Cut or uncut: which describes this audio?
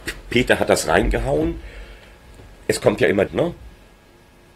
cut